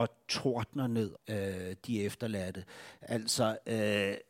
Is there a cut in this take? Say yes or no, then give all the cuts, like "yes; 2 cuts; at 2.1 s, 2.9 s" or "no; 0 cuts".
yes; 1 cut; at 1.2 s